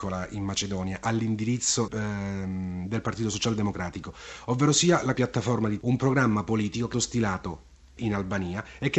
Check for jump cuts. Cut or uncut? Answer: cut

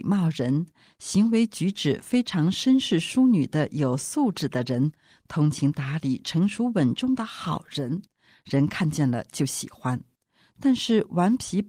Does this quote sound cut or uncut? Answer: uncut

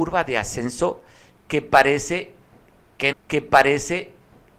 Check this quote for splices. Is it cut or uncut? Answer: cut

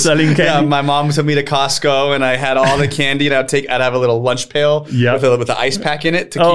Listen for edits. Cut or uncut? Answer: uncut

